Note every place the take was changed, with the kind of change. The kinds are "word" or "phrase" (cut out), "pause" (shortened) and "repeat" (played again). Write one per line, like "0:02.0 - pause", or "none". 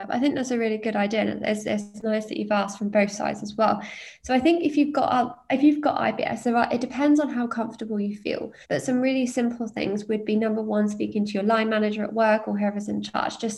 0:08.6 - pause